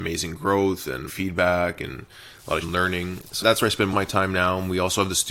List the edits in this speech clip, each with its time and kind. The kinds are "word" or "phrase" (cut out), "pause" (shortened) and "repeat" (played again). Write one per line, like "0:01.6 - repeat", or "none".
0:01.1 - word
0:02.6 - word
0:03.4 - word
0:03.9 - word